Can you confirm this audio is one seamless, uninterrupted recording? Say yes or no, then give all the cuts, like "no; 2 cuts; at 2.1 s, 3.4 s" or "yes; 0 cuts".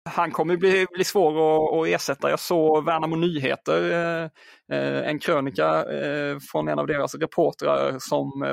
yes; 0 cuts